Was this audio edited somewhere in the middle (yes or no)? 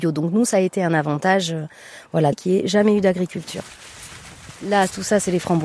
yes